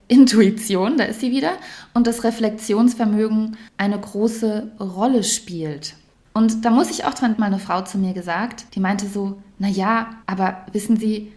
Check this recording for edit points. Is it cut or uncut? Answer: cut